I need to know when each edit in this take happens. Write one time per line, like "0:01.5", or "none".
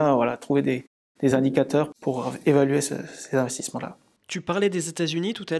none